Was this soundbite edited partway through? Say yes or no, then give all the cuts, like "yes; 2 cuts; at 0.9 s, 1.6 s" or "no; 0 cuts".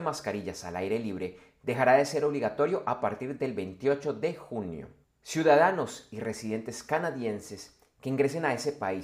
no; 0 cuts